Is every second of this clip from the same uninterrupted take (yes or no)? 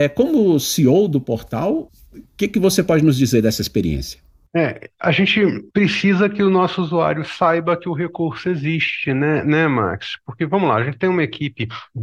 yes